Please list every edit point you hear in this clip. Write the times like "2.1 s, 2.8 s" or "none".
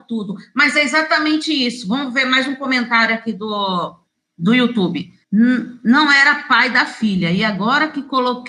4.1 s, 5.2 s